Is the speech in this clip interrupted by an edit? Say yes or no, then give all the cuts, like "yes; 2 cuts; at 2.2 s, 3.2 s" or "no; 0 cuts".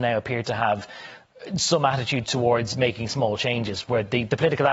no; 0 cuts